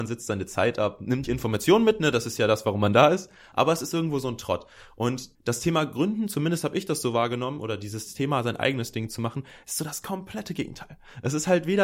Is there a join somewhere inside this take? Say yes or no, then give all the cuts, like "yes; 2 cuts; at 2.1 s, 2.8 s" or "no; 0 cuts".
yes; 2 cuts; at 1.2 s, 5.3 s